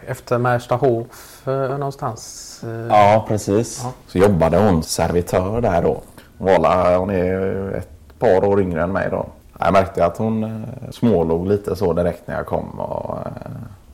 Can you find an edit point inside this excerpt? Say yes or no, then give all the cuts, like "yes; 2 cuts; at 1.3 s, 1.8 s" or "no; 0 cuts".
yes; 3 cuts; at 4.0 s, 4.8 s, 9.4 s